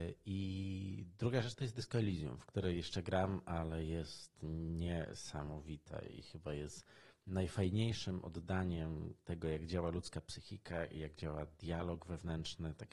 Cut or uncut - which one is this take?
uncut